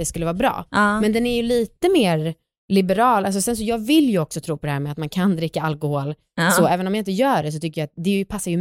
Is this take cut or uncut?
uncut